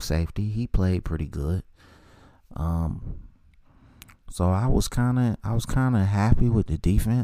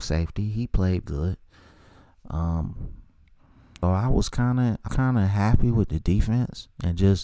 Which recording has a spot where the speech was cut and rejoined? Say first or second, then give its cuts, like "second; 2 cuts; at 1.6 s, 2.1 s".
second; 3 cuts; at 1.0 s, 3.8 s, 4.9 s